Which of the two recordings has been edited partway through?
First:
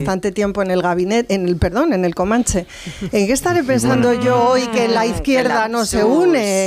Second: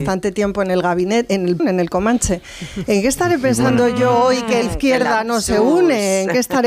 second; 2 cuts; at 1.6 s, 4.6 s

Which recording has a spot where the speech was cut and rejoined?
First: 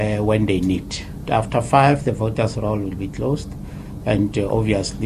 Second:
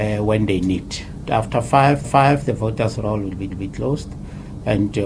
second; 2 cuts; at 2.0 s, 3.5 s

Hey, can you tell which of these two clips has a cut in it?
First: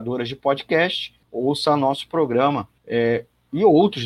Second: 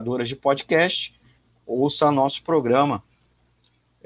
first; 2 cuts; at 1.2 s, 2.8 s

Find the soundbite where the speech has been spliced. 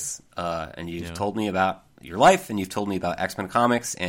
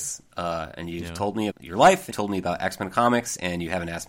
second; 2 cuts; at 1.5 s, 2.1 s

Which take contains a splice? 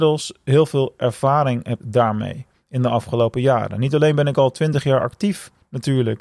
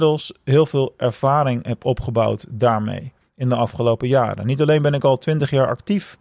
first; 1 cut; at 1.8 s

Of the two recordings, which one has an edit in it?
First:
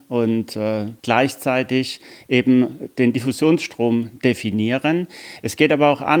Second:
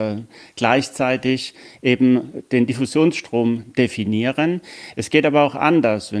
first; 1 cut; at 1.0 s

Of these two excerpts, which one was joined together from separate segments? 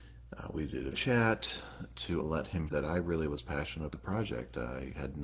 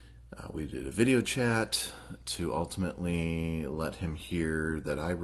first; 4 cuts; at 0.9 s, 2.2 s, 2.7 s, 3.9 s

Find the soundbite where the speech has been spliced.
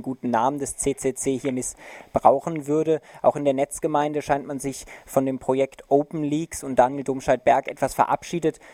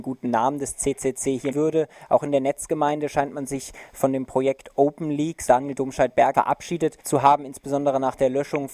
second; 4 cuts; at 1.5 s, 5.5 s, 6.3 s, 7.0 s

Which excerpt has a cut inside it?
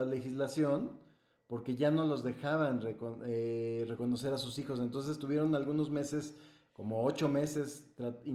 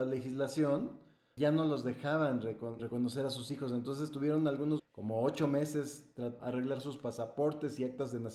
second; 4 cuts; at 1.4 s, 2.8 s, 4.8 s, 6.4 s

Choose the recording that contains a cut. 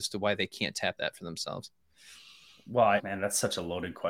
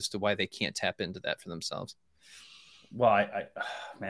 first; 2 cuts; at 1.0 s, 3.0 s

